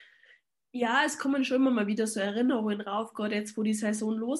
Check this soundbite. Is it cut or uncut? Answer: uncut